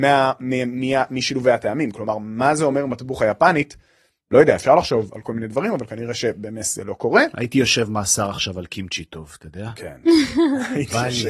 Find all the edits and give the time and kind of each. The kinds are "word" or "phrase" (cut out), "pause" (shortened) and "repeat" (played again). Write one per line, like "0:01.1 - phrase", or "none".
none